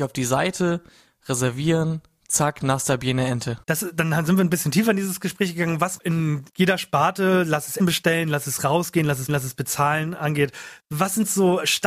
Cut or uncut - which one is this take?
cut